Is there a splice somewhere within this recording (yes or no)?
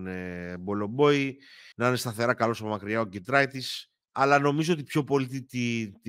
yes